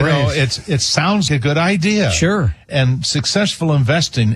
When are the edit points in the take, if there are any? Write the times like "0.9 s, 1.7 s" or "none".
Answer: 1.3 s, 2.7 s